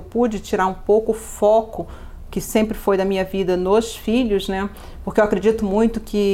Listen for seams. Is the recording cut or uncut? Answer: uncut